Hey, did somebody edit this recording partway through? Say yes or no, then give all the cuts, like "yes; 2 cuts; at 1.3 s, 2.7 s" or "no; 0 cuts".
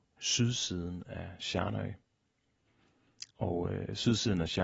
yes; 1 cut; at 3.3 s